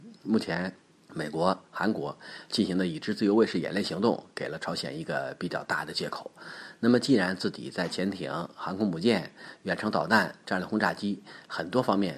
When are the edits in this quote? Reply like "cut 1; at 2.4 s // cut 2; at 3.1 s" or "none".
cut 1; at 1.0 s